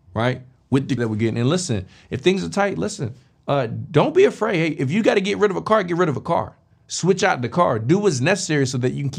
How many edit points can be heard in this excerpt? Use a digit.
1